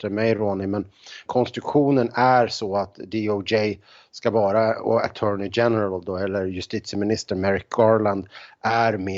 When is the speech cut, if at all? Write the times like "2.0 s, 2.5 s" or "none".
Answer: 1.3 s